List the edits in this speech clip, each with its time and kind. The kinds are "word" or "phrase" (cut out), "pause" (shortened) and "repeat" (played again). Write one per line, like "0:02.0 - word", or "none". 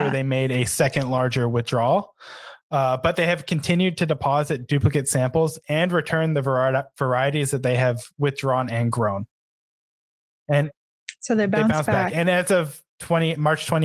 none